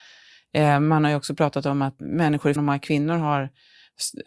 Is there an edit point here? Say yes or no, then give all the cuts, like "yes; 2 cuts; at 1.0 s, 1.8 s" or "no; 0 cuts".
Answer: yes; 2 cuts; at 2.0 s, 2.6 s